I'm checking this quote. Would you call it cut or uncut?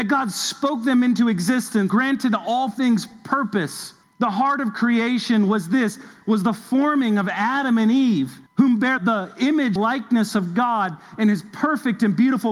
cut